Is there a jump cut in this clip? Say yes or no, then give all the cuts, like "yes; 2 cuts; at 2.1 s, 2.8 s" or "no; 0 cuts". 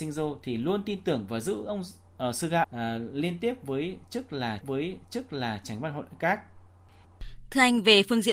yes; 2 cuts; at 2.6 s, 4.6 s